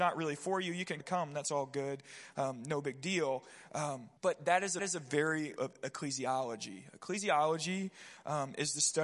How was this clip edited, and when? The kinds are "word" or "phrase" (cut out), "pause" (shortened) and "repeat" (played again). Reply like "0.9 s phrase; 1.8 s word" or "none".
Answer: 1.0 s phrase; 4.2 s pause; 4.8 s repeat; 5.6 s phrase